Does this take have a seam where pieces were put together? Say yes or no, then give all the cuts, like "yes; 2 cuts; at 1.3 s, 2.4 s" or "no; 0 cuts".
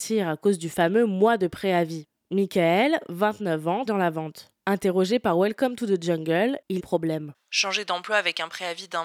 yes; 2 cuts; at 3.9 s, 6.8 s